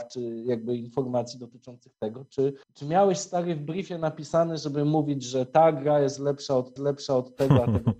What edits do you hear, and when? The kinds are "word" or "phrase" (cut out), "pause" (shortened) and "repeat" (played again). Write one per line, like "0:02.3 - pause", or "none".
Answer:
0:02.6 - pause
0:06.8 - repeat